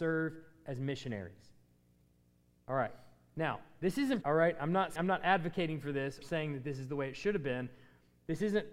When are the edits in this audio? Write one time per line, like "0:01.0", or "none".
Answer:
0:04.2
0:05.0
0:06.2

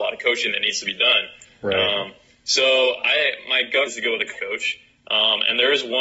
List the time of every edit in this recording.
0:03.9
0:04.3

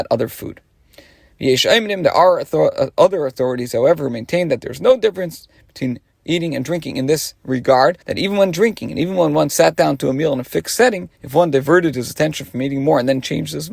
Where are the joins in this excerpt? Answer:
0:08.0
0:11.1

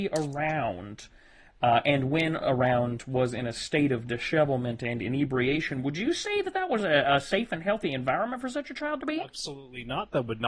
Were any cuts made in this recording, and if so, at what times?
none

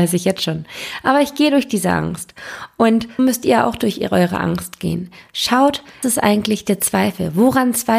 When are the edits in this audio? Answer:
0:03.2
0:06.0

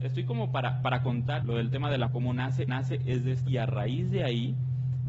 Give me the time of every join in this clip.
0:01.4
0:02.1
0:02.7
0:03.5

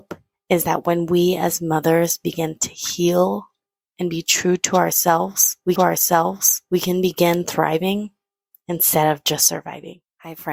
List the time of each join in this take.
0:05.8

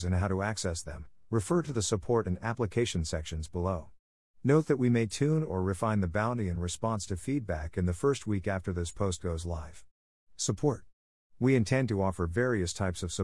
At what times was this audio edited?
none

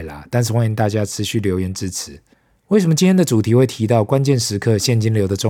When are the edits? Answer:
0:02.3

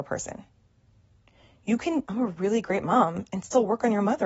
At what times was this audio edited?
0:02.0

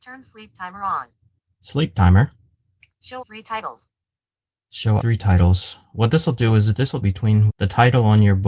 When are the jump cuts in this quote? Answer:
0:03.2
0:05.0
0:07.0
0:07.5

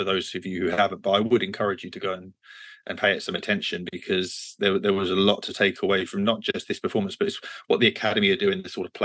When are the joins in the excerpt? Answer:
none

